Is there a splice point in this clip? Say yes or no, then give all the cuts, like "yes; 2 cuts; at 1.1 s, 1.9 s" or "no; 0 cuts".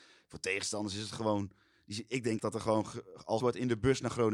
yes; 2 cuts; at 2.4 s, 3.4 s